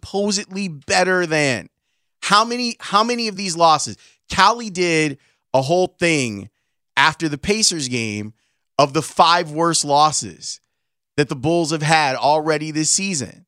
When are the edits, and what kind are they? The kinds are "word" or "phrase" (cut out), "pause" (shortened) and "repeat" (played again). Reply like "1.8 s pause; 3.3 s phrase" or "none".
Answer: none